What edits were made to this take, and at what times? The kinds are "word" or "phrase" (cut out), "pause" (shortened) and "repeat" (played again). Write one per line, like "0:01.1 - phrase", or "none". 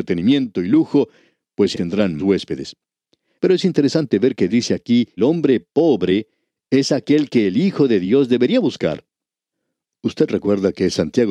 0:01.7 - word
0:02.2 - word
0:04.5 - word
0:05.2 - word

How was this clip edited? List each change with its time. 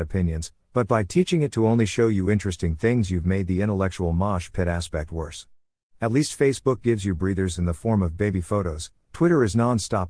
none

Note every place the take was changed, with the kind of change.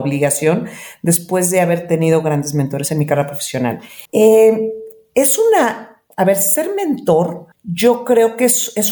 0:04.1 - pause
0:07.5 - pause

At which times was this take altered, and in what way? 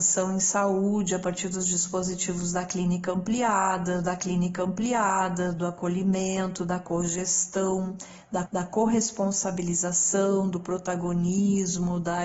0:04.0 - repeat
0:08.5 - repeat

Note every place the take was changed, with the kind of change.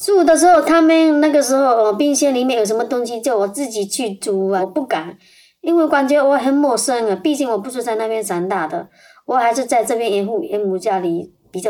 none

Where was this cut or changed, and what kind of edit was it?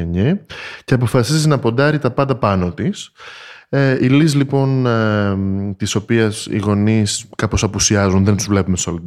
none

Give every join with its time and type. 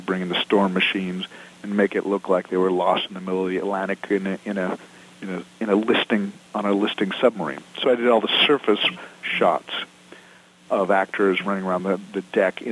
none

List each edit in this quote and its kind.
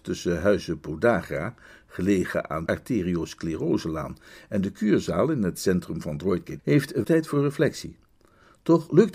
0:02.7 - word
0:06.6 - word
0:07.0 - word

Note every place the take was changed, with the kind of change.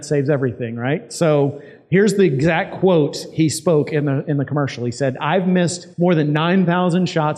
0:05.9 - pause

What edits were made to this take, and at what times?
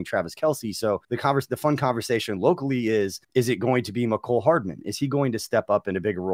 0:01.0 - pause
0:03.2 - pause

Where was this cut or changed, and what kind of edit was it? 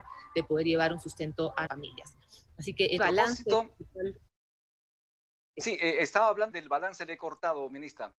0:01.7 - word
0:03.0 - word
0:06.5 - word

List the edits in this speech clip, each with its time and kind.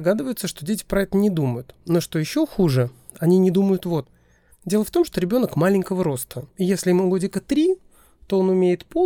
0:04.0 - phrase
0:06.5 - pause

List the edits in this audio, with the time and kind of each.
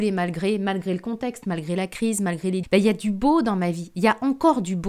0:02.6 - word

